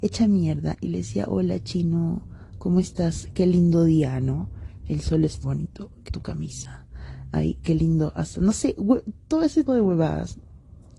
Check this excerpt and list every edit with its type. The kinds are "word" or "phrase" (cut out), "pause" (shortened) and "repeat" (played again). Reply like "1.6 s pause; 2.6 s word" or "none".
5.4 s word; 6.1 s word; 9.7 s word